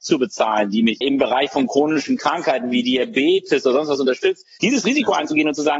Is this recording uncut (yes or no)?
no